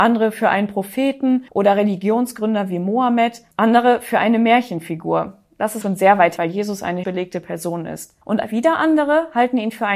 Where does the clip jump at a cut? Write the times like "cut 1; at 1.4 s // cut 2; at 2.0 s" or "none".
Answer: cut 1; at 1.5 s // cut 2; at 3.5 s // cut 3; at 5.8 s // cut 4; at 6.4 s // cut 5; at 7.0 s // cut 6; at 8.2 s